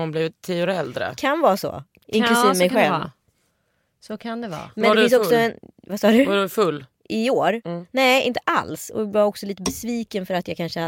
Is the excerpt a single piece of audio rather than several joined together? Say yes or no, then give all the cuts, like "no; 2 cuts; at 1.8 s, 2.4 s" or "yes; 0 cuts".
yes; 0 cuts